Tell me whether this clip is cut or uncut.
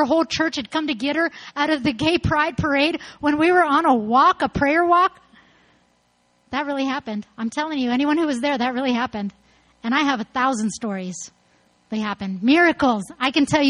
cut